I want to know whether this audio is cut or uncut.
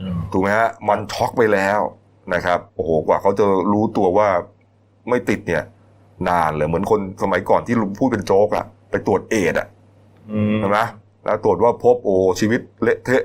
cut